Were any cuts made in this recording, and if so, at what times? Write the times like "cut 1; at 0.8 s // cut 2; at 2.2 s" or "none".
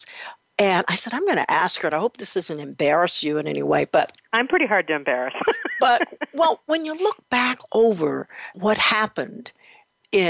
cut 1; at 8.5 s